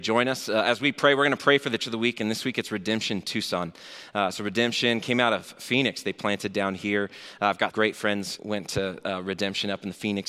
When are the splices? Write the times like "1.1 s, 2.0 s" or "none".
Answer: 1.8 s, 7.7 s, 8.4 s